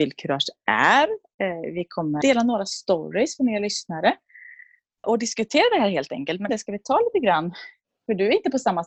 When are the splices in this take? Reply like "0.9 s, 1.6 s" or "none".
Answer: 2.2 s, 5.0 s, 6.5 s